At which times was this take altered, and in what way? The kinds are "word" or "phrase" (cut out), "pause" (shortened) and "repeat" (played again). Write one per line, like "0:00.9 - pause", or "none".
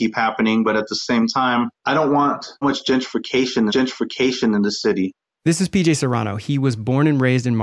0:01.7 - pause
0:02.6 - word
0:03.7 - repeat